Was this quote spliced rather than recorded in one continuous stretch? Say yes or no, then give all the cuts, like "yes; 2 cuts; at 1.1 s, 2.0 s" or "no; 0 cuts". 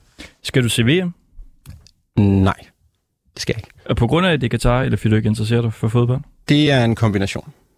no; 0 cuts